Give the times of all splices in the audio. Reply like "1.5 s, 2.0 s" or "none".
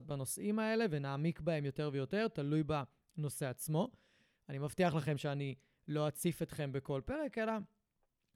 none